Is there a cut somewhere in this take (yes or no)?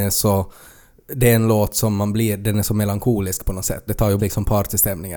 yes